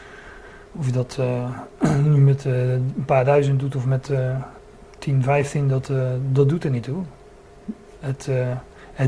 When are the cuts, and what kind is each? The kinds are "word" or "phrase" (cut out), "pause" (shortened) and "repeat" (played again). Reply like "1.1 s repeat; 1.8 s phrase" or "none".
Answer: 4.6 s pause

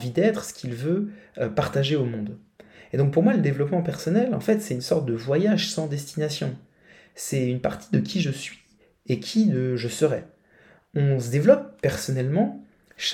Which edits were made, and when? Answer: none

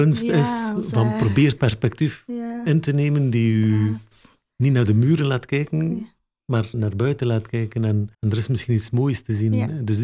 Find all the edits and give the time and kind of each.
1.6 s word; 6.7 s word; 8.1 s pause

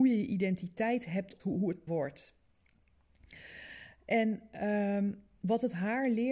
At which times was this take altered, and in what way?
1.4 s word; 1.9 s word

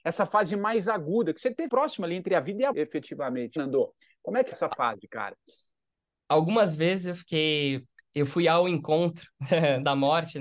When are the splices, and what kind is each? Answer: 1.7 s word; 2.7 s word; 3.6 s word; 4.5 s word

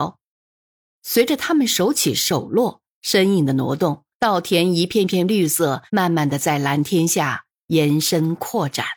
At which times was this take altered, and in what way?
4.1 s pause; 5.9 s pause

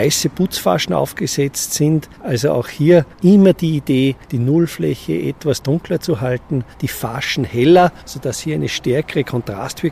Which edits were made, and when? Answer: 2.1 s pause; 3.1 s pause; 4.2 s pause; 6.7 s pause; 8.0 s pause

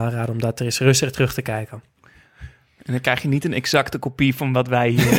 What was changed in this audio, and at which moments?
none

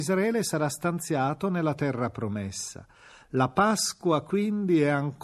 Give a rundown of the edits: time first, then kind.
none

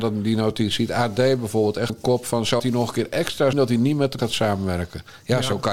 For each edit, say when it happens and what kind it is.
1.9 s word; 2.6 s word; 3.5 s word; 4.2 s word

